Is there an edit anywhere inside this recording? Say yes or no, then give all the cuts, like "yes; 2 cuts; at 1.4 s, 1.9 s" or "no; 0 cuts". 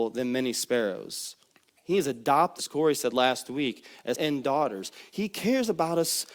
yes; 3 cuts; at 1.5 s, 2.6 s, 4.1 s